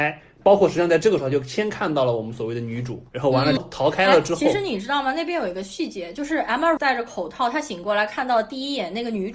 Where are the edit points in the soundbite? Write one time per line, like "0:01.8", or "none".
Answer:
0:03.1
0:03.6
0:06.8